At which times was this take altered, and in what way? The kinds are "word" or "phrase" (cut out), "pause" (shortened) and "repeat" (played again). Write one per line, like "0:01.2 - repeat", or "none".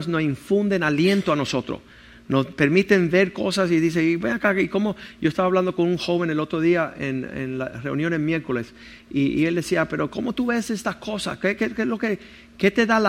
none

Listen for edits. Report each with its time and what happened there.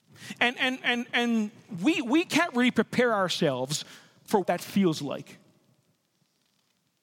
0:04.4 - word

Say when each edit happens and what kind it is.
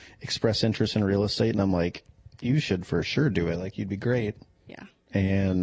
none

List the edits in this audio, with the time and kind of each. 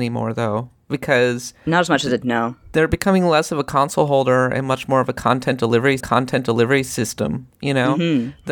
0:02.2 - word
0:06.0 - repeat

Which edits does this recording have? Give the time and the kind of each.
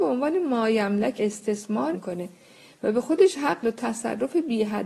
0:01.2 - word
0:01.9 - phrase
0:03.6 - word

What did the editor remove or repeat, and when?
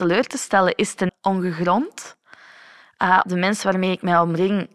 0:01.1 - word
0:03.2 - word

